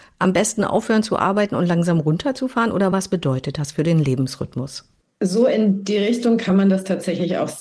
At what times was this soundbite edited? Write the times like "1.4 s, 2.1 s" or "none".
none